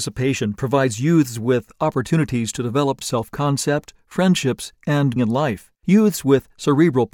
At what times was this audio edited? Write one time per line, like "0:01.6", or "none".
0:03.0
0:05.2
0:05.7